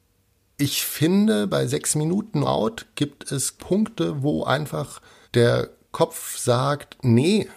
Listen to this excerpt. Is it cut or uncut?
cut